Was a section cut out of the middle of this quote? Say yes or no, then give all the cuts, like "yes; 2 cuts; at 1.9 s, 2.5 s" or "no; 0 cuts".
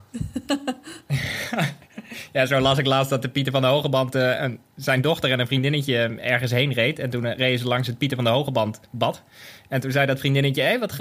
no; 0 cuts